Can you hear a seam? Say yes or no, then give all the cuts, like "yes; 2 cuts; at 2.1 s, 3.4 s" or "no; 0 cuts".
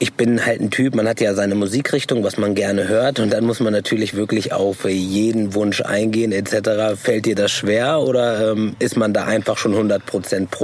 no; 0 cuts